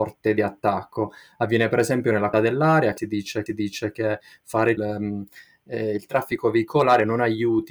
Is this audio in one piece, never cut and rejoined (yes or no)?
no